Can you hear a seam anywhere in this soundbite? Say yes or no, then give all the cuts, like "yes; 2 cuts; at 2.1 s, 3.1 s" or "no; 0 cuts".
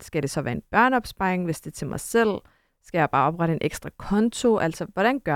no; 0 cuts